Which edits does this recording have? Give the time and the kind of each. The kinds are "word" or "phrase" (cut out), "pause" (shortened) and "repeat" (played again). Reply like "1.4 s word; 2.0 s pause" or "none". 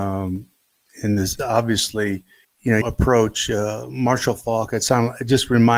1.4 s word; 2.4 s pause; 2.8 s phrase